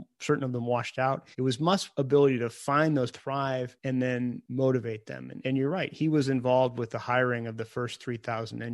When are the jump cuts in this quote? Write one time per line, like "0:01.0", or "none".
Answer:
0:01.3
0:03.1
0:05.4